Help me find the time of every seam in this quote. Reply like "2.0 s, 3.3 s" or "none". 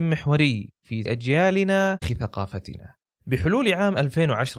1.1 s, 2.0 s